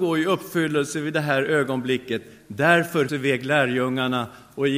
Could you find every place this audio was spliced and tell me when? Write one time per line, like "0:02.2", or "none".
0:03.1